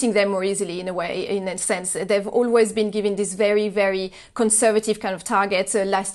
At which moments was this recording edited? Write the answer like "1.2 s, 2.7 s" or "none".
none